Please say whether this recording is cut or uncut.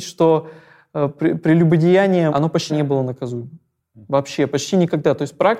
cut